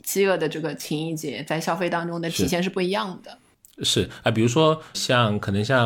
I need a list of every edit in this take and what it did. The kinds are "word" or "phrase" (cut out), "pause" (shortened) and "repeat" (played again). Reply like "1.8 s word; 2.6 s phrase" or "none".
4.9 s word